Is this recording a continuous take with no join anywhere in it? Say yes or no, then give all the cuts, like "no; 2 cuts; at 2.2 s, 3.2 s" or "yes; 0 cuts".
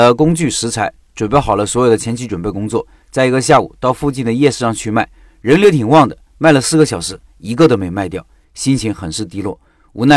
yes; 0 cuts